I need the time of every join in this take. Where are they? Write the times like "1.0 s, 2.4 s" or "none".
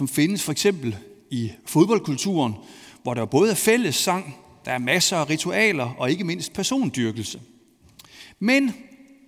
none